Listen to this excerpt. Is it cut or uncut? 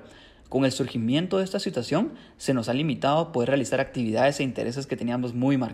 uncut